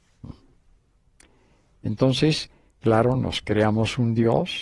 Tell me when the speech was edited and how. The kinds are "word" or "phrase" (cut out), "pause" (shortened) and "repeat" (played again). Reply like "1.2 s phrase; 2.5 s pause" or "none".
none